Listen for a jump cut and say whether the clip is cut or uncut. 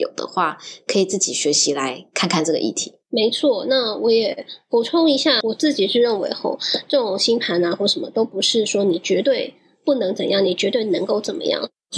cut